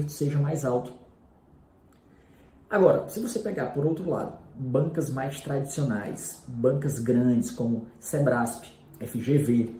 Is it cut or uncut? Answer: uncut